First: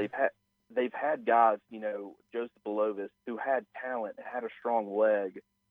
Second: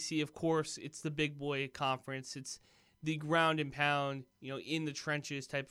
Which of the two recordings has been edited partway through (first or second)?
first